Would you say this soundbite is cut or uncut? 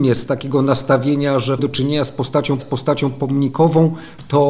cut